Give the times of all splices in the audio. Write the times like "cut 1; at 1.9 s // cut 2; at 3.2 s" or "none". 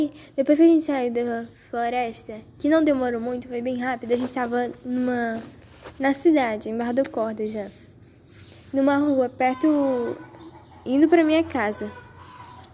none